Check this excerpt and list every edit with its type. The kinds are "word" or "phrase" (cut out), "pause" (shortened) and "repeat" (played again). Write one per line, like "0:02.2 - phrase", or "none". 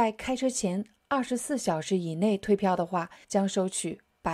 0:03.2 - pause